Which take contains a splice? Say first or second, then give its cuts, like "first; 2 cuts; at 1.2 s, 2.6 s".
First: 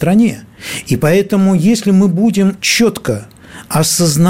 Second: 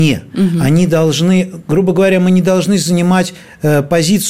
first; 1 cut; at 2.6 s